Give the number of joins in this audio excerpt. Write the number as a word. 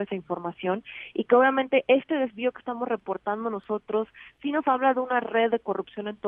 zero